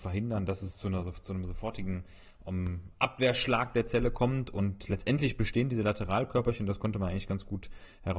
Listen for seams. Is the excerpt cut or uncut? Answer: uncut